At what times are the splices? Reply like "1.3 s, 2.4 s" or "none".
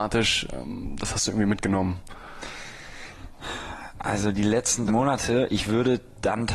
4.9 s